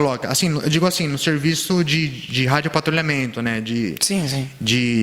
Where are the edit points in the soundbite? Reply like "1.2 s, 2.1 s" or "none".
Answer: none